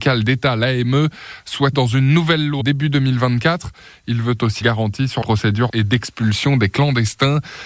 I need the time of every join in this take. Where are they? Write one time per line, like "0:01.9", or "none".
0:01.7
0:02.6
0:04.6
0:05.2
0:05.7